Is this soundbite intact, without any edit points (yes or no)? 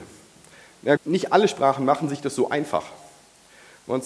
no